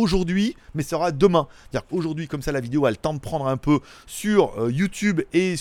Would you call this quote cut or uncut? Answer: uncut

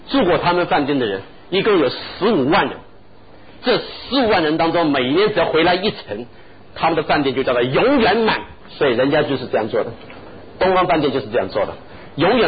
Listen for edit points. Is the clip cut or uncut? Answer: cut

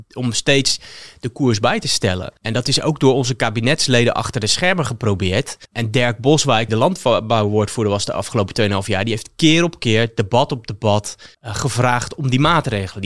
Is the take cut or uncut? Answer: cut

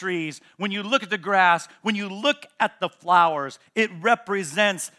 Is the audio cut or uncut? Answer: uncut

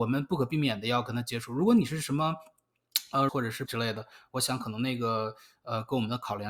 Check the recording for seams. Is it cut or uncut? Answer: cut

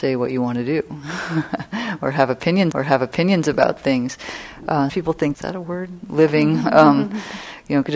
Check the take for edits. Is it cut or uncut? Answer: cut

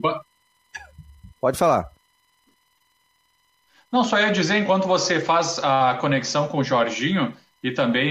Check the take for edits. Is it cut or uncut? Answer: cut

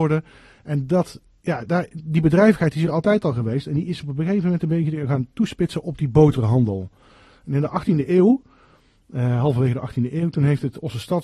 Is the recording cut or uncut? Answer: uncut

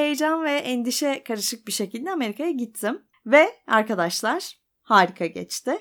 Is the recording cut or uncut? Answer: cut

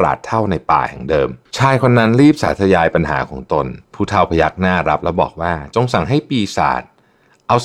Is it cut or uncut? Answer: cut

